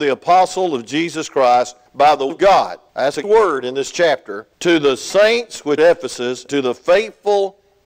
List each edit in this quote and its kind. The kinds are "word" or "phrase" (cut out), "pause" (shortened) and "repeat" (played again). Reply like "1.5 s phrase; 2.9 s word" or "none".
1.9 s pause; 2.3 s word; 2.9 s pause; 3.2 s word; 4.5 s pause; 5.8 s word; 6.5 s word